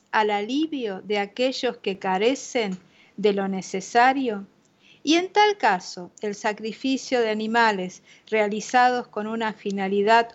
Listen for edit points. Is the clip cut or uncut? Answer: uncut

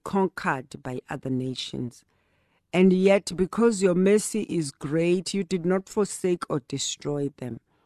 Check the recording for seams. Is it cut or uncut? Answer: uncut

